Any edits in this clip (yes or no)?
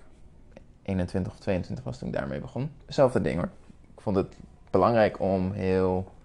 yes